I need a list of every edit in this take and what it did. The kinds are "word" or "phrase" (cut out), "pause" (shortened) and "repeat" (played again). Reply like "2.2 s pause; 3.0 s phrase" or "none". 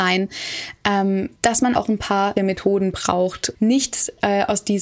1.4 s pause; 1.7 s word; 2.4 s word; 3.5 s word

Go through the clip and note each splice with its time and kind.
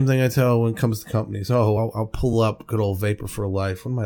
none

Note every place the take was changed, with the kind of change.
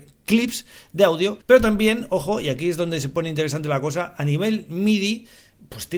1.4 s pause

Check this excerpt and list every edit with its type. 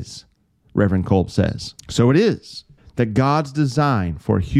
1.8 s pause; 2.8 s pause

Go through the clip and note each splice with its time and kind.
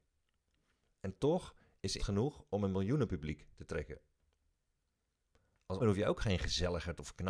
2.0 s word; 5.8 s word

